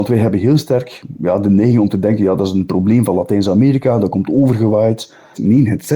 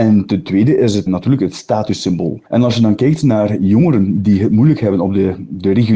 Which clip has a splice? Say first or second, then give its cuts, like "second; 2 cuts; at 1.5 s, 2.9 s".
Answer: second; 2 cuts; at 1.1 s, 2.5 s